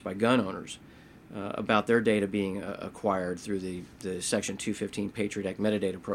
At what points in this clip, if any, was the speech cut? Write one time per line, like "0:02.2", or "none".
none